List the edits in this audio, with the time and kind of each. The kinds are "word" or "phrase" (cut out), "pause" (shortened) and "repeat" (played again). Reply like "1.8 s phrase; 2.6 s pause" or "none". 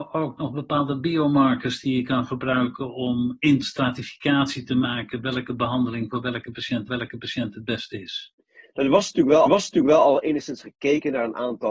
3.6 s phrase; 6.9 s repeat; 9.5 s repeat